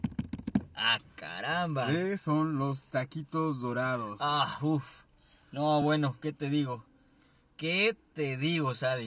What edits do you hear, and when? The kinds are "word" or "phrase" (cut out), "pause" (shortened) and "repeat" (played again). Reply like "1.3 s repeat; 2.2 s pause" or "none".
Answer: none